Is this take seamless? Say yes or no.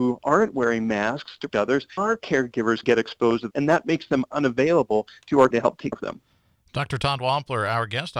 no